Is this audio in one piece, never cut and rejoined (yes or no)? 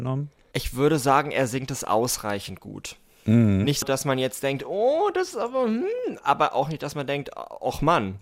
no